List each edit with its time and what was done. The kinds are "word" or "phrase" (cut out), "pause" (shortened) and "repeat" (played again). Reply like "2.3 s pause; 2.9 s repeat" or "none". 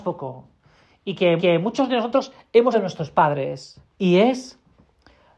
1.4 s repeat; 2.7 s word; 3.9 s pause